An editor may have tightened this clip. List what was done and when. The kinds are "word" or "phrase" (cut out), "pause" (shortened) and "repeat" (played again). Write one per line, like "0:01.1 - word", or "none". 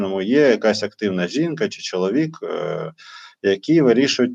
none